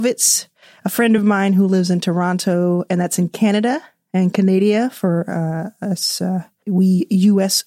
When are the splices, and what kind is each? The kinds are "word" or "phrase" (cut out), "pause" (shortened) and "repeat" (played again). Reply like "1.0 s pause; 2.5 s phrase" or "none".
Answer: none